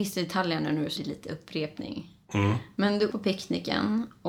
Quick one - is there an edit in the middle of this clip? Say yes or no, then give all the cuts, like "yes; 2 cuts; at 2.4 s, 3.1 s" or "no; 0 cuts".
yes; 2 cuts; at 1.0 s, 3.1 s